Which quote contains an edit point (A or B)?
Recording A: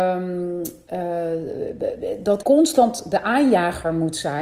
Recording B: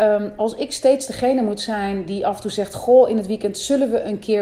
A